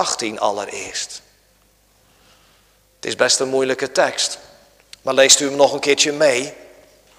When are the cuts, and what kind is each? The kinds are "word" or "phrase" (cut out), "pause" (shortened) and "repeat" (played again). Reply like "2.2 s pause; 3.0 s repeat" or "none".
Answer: none